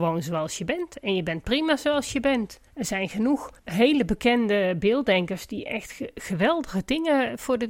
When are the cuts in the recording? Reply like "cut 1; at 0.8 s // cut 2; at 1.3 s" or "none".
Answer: cut 1; at 2.7 s // cut 2; at 3.6 s